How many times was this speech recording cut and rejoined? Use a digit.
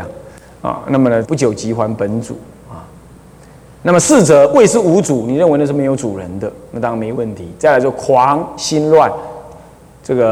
1